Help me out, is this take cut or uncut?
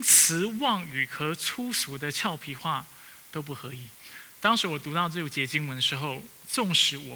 cut